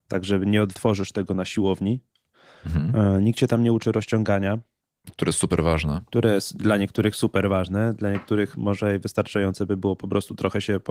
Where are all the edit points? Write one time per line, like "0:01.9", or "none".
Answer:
none

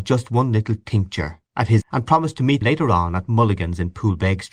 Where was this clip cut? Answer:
0:01.8
0:02.6

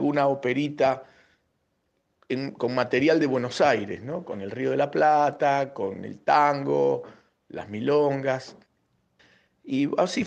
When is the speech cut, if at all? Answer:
none

